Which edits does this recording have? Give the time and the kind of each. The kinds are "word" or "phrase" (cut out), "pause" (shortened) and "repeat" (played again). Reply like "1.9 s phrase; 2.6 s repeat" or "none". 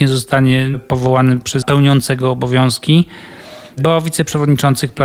1.6 s phrase